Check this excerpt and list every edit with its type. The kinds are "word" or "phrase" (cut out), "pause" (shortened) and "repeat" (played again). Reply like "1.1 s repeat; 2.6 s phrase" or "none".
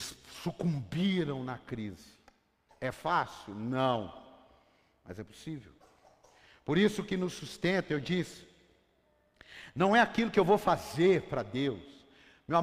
none